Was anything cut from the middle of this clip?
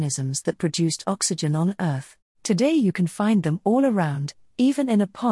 yes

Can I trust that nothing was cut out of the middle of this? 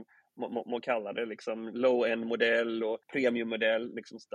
no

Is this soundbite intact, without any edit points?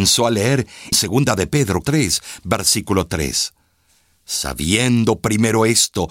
no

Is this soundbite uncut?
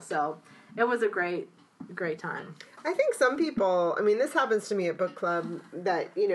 yes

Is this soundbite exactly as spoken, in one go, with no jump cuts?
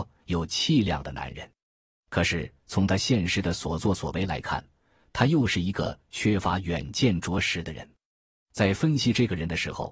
yes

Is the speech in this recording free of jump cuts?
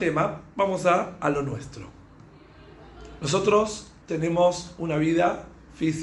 no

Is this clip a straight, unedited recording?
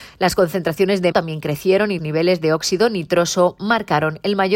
no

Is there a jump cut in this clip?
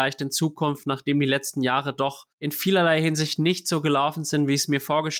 yes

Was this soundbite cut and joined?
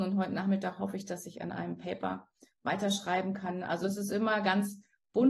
no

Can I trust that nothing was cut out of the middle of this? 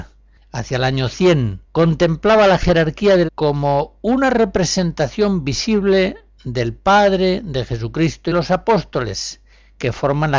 no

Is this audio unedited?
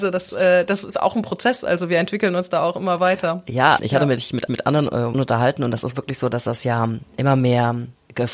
no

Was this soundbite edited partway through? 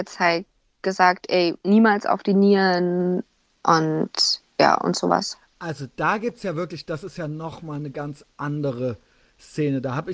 no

